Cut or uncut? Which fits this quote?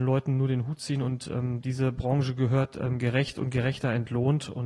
uncut